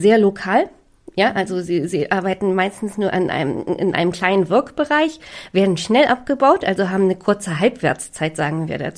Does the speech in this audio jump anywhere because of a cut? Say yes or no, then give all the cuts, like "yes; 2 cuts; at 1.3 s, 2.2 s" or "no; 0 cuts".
no; 0 cuts